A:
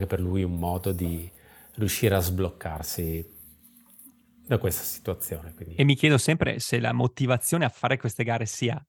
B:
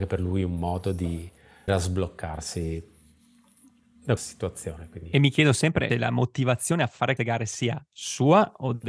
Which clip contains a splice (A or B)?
B